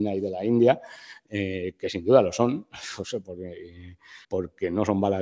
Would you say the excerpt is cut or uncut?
cut